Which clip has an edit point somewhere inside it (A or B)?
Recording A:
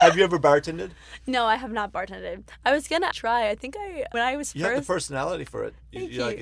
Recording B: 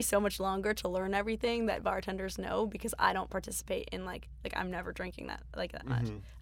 A